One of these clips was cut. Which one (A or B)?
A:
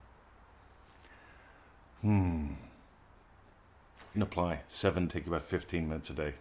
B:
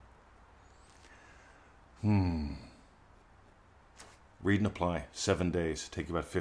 A